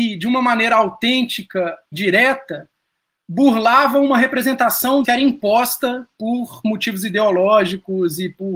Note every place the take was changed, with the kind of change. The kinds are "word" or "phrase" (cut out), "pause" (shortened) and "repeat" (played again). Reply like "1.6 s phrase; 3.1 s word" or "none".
1.9 s word; 5.0 s phrase; 6.1 s pause